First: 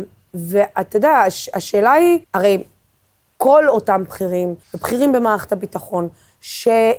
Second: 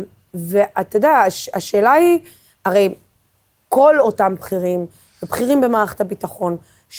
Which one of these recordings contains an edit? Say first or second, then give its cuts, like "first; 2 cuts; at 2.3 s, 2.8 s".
first; 2 cuts; at 2.2 s, 4.6 s